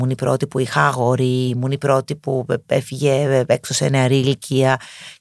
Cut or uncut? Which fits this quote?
uncut